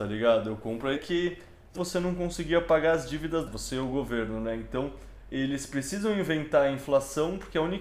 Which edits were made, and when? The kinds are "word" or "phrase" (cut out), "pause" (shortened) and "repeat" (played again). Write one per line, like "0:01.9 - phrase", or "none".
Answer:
0:01.0 - word
0:01.7 - phrase
0:03.5 - word